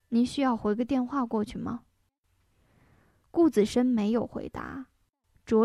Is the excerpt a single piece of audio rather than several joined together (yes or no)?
yes